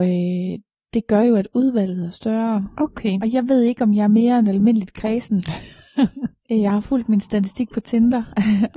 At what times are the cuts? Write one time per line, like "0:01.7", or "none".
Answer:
none